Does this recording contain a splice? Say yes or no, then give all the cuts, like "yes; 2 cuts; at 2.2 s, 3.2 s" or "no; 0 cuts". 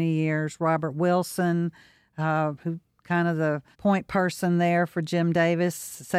yes; 1 cut; at 3.7 s